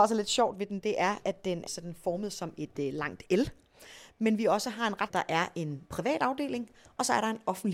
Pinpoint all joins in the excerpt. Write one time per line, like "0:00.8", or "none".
0:05.1

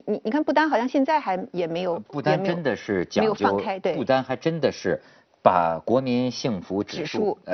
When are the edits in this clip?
none

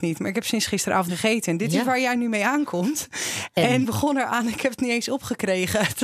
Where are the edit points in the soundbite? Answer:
0:01.1
0:03.8

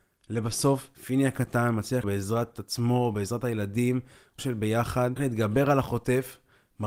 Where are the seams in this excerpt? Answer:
0:00.9
0:02.0
0:04.4
0:05.2

